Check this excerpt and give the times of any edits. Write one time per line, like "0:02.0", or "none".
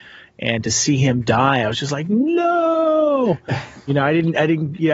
none